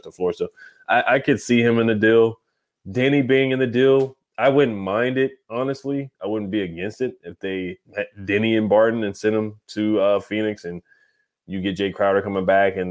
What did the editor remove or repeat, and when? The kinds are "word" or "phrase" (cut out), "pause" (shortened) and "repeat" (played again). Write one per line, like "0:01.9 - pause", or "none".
0:07.8 - pause